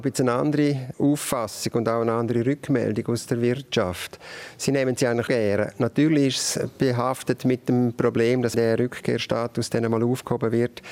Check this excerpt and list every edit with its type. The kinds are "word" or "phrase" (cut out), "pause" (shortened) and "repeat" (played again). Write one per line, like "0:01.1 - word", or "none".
0:00.9 - word
0:05.3 - word
0:08.5 - word